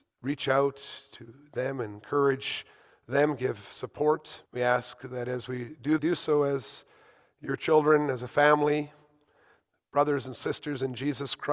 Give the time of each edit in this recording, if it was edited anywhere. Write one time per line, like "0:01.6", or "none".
0:04.5
0:06.0